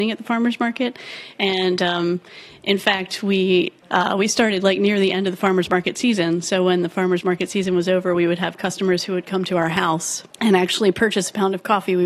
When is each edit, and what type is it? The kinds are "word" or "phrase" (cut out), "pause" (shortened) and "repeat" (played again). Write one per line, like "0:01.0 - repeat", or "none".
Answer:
0:03.8 - pause
0:10.3 - pause